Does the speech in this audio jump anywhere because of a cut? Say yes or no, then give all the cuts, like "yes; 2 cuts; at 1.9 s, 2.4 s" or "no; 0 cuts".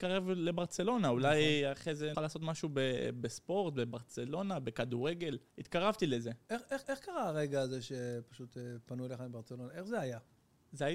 yes; 3 cuts; at 2.1 s, 5.5 s, 6.8 s